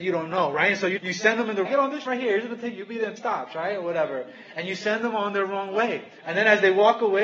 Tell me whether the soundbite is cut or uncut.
cut